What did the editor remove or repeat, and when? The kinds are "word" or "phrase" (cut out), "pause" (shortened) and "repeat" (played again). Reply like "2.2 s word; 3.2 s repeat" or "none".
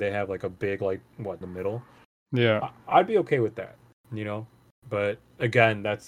1.4 s phrase